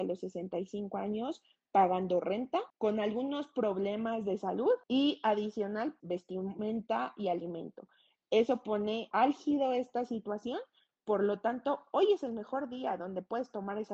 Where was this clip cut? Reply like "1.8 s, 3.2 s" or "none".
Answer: 2.7 s, 4.8 s, 6.0 s, 9.1 s